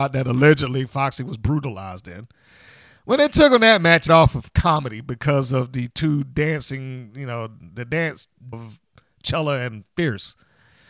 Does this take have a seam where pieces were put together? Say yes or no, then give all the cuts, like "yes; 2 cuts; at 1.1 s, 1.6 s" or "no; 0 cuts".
yes; 2 cuts; at 4.1 s, 8.5 s